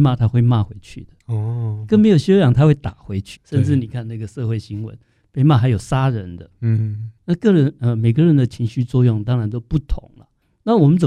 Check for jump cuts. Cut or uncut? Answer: cut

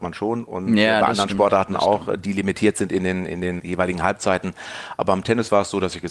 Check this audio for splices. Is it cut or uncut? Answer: cut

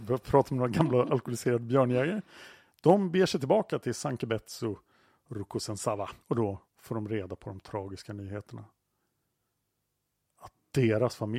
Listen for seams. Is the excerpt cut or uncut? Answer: cut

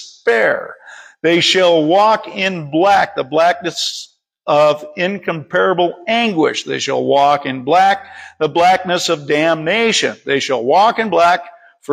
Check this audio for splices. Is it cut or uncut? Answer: uncut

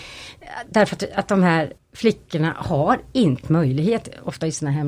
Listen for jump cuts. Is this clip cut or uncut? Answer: cut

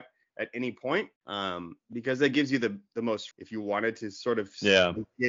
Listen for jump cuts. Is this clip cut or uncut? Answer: cut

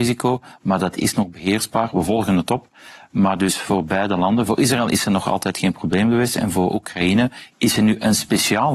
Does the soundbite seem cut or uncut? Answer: uncut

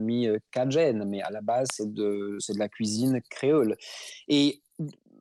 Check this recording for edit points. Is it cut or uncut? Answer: uncut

